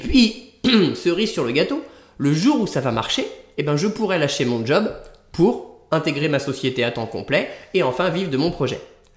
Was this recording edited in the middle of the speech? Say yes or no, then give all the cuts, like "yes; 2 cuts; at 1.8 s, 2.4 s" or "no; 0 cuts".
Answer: no; 0 cuts